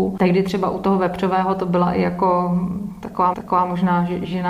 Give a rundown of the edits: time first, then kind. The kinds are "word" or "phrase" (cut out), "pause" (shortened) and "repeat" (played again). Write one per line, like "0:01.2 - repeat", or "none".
0:03.3 - repeat